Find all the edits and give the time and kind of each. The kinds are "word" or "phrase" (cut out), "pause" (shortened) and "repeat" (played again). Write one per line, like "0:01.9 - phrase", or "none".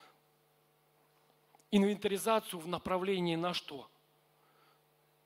none